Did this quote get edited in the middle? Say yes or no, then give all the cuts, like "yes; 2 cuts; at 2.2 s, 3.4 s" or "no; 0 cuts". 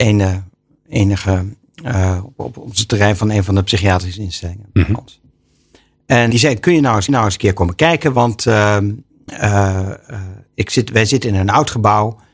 yes; 2 cuts; at 6.3 s, 7.1 s